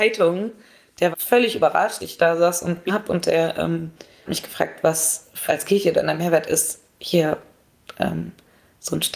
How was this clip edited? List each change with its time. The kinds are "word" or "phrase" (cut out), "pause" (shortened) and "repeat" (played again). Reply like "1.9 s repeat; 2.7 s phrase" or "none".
1.1 s word; 2.0 s word; 2.9 s word; 4.3 s word; 5.5 s word